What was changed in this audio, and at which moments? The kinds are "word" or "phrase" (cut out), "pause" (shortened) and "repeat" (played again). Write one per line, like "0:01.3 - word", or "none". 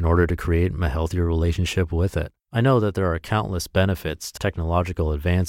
0:02.4 - pause
0:04.4 - word